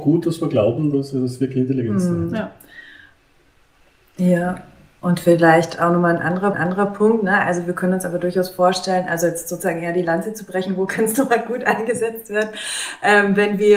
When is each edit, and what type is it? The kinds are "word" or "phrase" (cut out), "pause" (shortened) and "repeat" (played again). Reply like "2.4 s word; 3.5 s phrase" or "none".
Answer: 6.5 s repeat